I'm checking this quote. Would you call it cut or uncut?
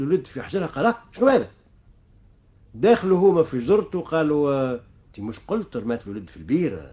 uncut